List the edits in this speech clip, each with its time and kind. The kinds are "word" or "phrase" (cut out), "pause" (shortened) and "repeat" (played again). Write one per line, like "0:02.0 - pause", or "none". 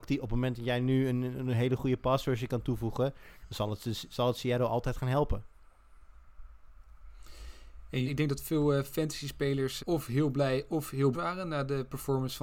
0:08.1 - word
0:09.8 - word
0:11.1 - word